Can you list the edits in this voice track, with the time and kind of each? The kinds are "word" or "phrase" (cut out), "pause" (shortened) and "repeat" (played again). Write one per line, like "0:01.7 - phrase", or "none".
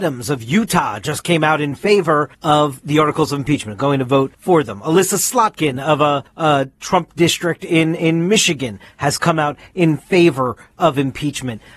0:02.3 - pause
0:04.3 - pause
0:06.3 - pause